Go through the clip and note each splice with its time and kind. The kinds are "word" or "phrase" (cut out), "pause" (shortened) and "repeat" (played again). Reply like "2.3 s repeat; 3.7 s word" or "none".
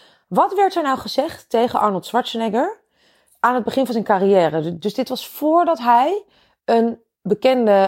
none